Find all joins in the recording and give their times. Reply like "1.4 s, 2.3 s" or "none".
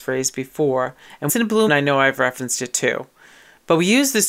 1.3 s, 1.7 s